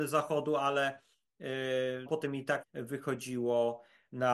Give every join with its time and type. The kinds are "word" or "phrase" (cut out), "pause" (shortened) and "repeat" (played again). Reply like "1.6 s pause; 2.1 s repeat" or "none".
2.1 s word; 2.6 s word